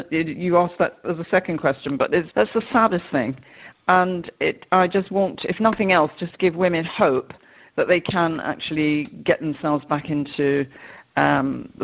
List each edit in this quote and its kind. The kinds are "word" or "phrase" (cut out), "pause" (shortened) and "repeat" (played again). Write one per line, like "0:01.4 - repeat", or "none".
0:02.3 - word